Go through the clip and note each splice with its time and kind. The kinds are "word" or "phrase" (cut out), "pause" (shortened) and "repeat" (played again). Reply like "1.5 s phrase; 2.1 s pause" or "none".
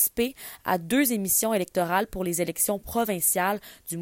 none